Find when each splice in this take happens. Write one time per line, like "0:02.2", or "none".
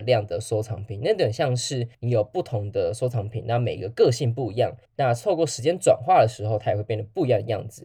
0:01.9
0:04.9